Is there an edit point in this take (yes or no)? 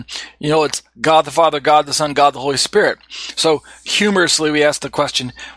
no